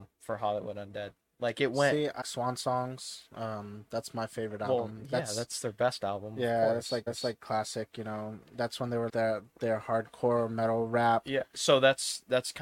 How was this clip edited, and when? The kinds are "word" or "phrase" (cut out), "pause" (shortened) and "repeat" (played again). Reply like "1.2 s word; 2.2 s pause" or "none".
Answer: 2.2 s word; 7.1 s repeat; 9.1 s word